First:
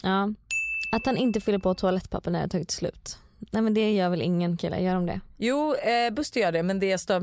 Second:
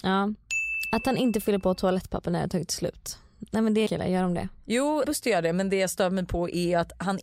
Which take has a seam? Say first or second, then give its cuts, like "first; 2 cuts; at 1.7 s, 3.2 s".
second; 2 cuts; at 3.9 s, 5.0 s